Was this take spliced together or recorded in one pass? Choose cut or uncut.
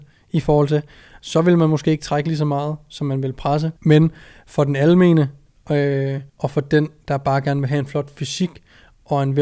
cut